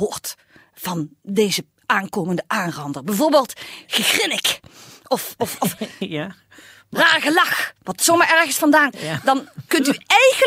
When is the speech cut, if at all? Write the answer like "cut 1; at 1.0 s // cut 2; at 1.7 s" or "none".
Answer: cut 1; at 5.6 s // cut 2; at 8.9 s